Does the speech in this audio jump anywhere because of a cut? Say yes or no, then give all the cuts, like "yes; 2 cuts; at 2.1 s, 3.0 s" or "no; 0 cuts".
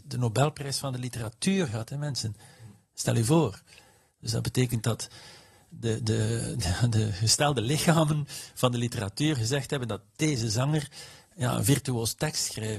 no; 0 cuts